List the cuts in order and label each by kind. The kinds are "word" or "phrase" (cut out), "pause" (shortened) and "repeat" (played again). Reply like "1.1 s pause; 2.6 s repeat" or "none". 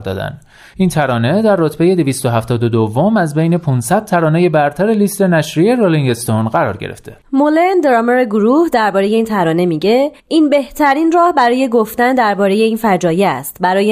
7.2 s pause; 10.2 s pause